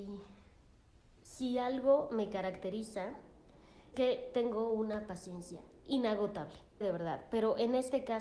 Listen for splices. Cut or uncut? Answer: cut